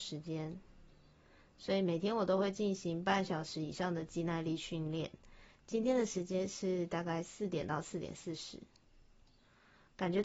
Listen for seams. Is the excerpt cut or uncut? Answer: uncut